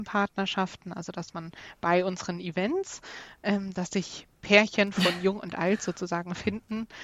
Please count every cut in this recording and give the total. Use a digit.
0